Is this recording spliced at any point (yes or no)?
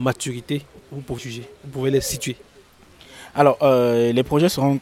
yes